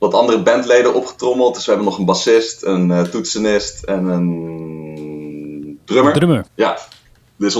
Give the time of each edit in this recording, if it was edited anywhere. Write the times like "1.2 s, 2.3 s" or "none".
6.5 s